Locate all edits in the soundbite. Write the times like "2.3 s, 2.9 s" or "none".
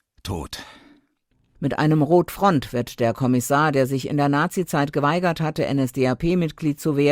none